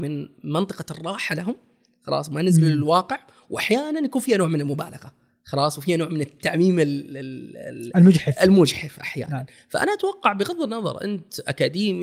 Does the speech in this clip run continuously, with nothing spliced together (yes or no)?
yes